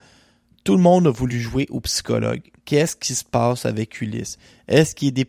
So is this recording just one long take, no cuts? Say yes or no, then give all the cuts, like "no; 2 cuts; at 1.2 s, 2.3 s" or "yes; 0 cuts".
yes; 0 cuts